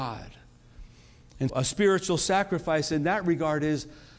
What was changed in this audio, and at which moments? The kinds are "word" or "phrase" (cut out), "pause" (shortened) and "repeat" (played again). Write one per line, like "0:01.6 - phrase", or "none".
0:01.5 - word